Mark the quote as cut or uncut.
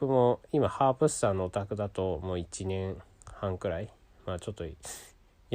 uncut